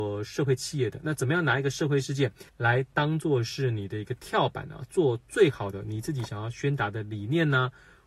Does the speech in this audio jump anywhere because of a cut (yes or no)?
yes